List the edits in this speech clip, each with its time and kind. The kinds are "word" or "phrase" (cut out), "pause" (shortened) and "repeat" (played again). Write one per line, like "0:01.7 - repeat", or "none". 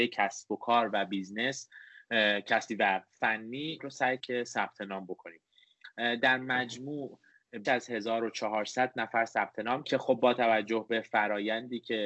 0:02.7 - phrase
0:03.8 - word
0:04.2 - word
0:07.6 - word
0:09.8 - phrase